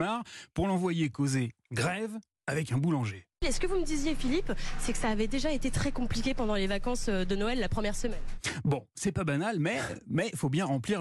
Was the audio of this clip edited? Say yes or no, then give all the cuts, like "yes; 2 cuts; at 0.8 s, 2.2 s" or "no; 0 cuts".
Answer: no; 0 cuts